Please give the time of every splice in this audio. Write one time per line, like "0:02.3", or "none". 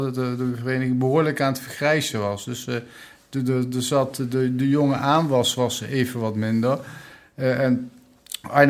none